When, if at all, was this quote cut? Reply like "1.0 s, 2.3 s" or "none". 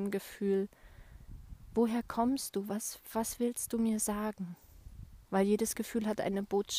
5.2 s